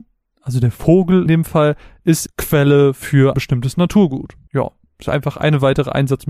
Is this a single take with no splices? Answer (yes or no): no